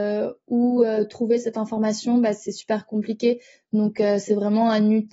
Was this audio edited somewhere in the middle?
no; 0 cuts

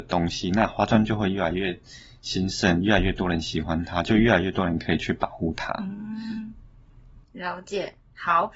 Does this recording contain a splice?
no; 0 cuts

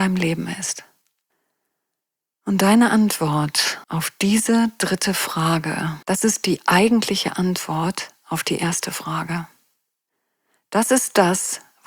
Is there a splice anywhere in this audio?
yes; 3 cuts; at 1.3 s, 3.8 s, 6.0 s

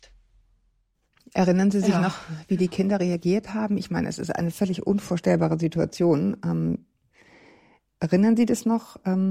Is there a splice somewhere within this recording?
yes; 1 cut; at 4.5 s

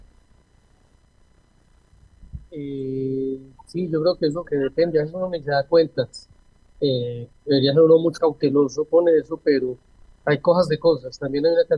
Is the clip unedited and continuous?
no; 2 cuts; at 4.4 s, 8.2 s

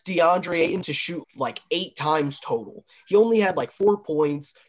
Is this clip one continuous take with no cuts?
no; 1 cut; at 1.2 s

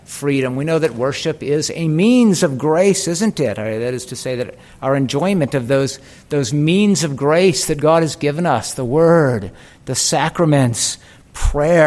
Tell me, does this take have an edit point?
no; 0 cuts

